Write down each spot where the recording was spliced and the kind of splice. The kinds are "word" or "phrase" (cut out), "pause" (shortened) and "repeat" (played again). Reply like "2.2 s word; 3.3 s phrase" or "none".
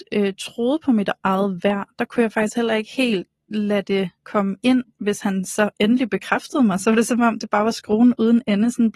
4.2 s pause